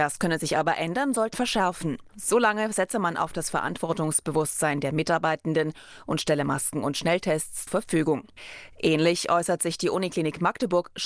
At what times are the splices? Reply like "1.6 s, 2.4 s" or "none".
1.3 s, 2.1 s, 7.7 s